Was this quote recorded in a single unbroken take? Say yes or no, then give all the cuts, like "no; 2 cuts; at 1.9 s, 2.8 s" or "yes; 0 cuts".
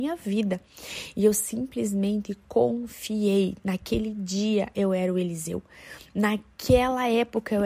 yes; 0 cuts